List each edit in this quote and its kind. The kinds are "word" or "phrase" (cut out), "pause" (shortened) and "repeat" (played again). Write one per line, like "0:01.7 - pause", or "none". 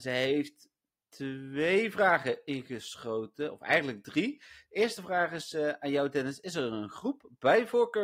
none